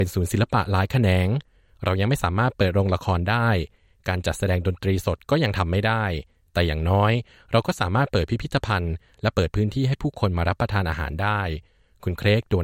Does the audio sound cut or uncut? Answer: uncut